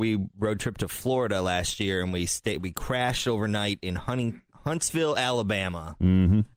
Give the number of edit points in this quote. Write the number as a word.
one